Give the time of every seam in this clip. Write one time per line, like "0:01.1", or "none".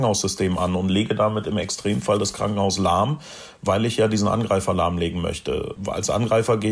none